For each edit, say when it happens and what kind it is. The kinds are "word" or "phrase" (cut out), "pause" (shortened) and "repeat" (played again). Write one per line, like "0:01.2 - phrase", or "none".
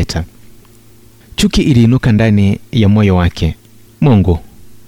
0:03.9 - pause